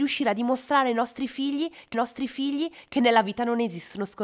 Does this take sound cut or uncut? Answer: cut